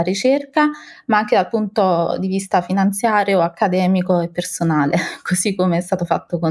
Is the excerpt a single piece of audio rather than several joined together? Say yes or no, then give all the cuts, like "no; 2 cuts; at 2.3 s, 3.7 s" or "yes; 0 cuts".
yes; 0 cuts